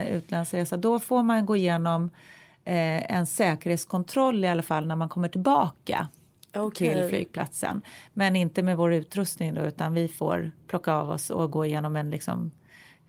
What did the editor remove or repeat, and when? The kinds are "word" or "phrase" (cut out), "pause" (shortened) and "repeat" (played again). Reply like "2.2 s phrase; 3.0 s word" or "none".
none